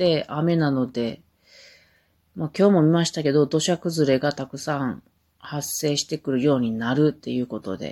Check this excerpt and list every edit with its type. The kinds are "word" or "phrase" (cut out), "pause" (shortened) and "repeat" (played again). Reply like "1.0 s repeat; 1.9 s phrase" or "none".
none